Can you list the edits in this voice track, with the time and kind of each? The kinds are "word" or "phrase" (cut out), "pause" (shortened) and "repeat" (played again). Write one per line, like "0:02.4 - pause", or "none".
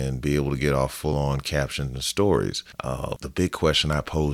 none